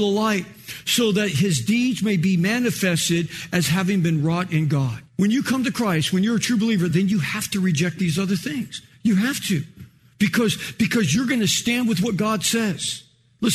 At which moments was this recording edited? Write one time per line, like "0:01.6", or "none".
none